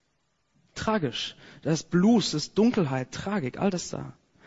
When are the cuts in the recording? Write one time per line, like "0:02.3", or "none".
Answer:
none